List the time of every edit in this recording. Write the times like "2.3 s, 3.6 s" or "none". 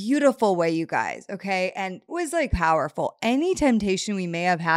2.1 s, 2.5 s